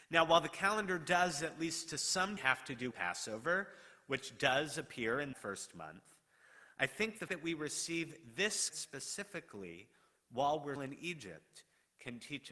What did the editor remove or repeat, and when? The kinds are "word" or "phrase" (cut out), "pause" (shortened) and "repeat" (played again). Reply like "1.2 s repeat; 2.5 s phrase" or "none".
2.4 s word; 2.9 s word; 5.3 s word; 7.3 s word; 8.7 s word; 10.8 s word